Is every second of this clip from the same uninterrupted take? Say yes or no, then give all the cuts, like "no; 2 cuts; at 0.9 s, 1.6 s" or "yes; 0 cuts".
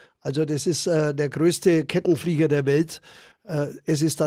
yes; 0 cuts